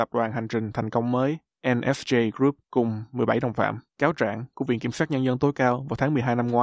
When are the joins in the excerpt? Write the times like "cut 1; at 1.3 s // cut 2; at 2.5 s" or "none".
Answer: cut 1; at 2.6 s // cut 2; at 3.9 s